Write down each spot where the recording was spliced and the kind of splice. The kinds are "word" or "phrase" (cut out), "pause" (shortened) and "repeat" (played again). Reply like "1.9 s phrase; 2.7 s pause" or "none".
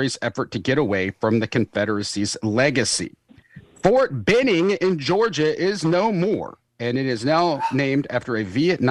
6.7 s pause